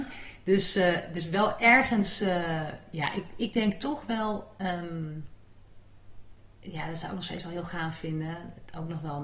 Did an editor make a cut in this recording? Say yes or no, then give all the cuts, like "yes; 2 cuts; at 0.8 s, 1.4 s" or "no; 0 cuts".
yes; 1 cut; at 6.4 s